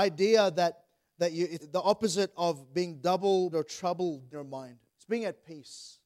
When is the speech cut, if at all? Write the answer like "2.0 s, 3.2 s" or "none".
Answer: 1.6 s, 3.5 s, 4.3 s, 4.9 s